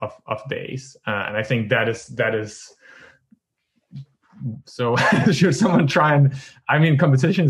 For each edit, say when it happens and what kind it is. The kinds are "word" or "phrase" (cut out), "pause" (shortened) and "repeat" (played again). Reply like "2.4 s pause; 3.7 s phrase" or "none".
none